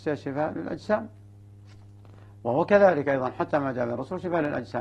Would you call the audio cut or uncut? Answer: uncut